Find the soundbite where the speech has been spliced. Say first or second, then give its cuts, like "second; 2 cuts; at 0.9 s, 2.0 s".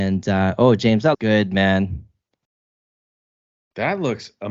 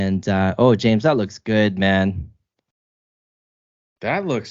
first; 1 cut; at 1.1 s